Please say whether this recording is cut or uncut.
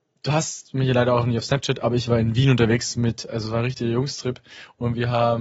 uncut